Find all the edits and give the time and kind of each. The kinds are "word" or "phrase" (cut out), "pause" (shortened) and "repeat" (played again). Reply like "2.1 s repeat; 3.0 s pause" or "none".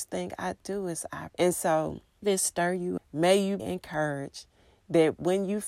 1.3 s word; 2.2 s word; 3.0 s word; 3.6 s word